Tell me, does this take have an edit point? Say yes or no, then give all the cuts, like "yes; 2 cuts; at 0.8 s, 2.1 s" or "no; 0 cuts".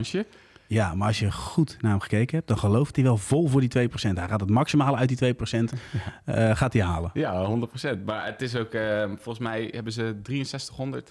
yes; 1 cut; at 2.9 s